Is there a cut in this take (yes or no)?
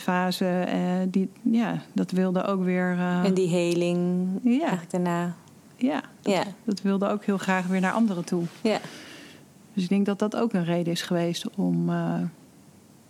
no